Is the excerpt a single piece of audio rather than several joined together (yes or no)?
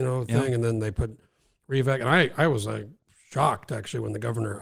yes